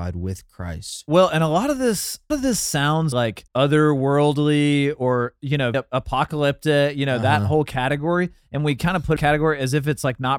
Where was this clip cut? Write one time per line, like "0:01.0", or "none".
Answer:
0:02.3
0:03.1
0:03.5
0:05.7
0:09.2